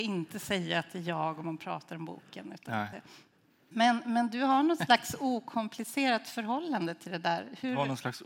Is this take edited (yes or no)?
no